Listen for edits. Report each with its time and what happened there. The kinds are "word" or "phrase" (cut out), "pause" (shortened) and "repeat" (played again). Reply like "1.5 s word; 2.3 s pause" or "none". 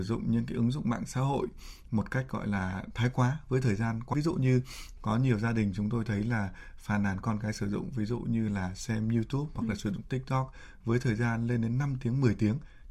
4.1 s word; 5.0 s word

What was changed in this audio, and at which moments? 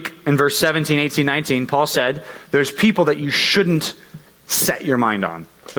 none

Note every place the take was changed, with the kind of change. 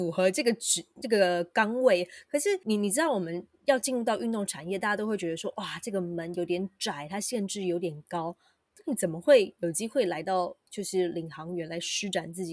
none

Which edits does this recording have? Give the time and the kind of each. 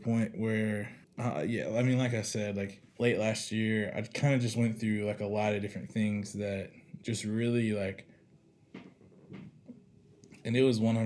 1.0 s pause; 2.9 s pause

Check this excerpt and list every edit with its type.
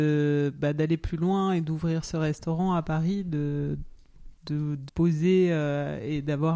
4.4 s pause; 4.9 s word

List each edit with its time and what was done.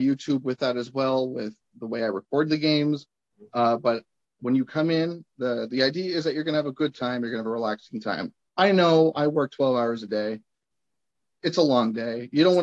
none

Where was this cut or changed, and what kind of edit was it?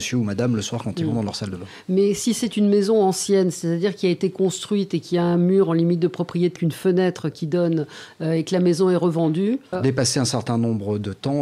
6.6 s word; 9.7 s word

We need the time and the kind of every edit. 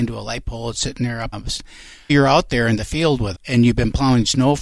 1.3 s word; 2.1 s word; 3.3 s word

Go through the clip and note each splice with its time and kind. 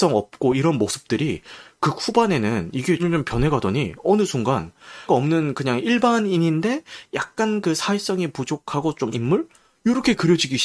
3.0 s word; 5.1 s word; 9.1 s word

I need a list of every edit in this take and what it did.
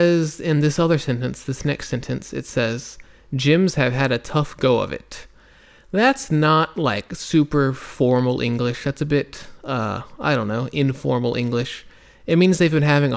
none

